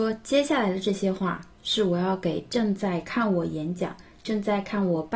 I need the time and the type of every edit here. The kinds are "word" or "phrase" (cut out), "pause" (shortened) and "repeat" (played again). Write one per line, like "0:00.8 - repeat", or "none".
none